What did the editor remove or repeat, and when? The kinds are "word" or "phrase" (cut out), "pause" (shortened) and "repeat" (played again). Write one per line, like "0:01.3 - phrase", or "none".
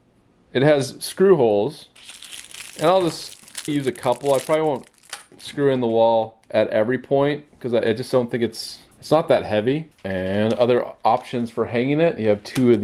0:03.7 - word
0:06.4 - pause
0:08.9 - pause
0:09.9 - pause